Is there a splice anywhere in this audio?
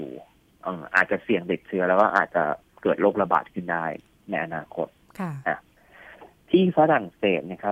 no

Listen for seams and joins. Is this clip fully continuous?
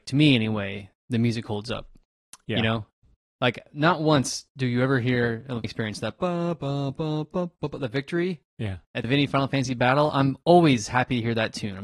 no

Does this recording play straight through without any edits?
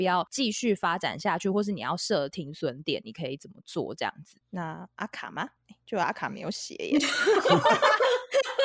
no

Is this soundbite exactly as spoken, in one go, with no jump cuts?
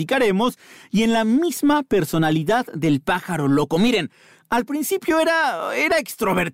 yes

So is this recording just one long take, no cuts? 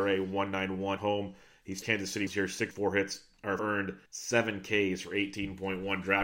no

